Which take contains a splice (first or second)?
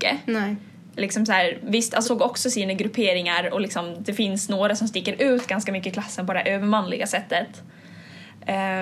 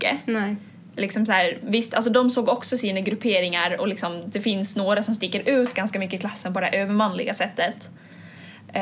first